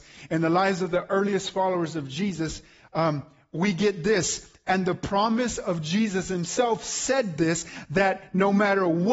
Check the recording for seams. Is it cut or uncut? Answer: uncut